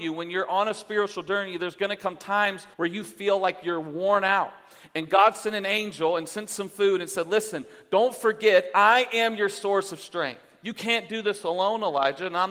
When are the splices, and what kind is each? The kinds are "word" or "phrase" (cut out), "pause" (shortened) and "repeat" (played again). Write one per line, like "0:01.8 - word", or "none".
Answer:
0:02.7 - pause